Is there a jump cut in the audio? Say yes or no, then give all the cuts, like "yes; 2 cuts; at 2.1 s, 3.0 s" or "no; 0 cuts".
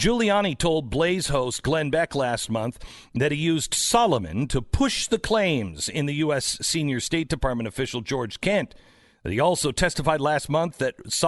no; 0 cuts